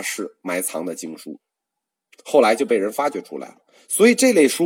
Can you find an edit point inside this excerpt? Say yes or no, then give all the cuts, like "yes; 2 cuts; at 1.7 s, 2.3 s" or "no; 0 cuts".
no; 0 cuts